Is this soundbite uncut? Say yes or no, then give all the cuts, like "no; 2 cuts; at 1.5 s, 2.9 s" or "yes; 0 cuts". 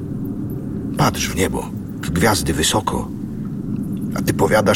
no; 1 cut; at 2.0 s